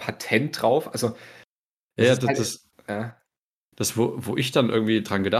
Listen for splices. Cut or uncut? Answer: uncut